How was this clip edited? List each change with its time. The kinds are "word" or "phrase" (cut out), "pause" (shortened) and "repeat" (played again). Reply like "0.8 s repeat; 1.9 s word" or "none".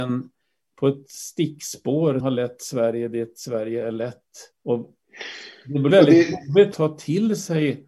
2.2 s word; 4.5 s pause; 5.9 s word; 6.7 s word